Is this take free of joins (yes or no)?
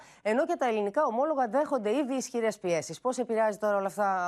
yes